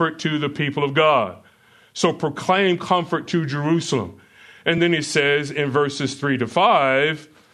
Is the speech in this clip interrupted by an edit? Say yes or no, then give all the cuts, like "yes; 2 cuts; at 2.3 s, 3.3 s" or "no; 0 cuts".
no; 0 cuts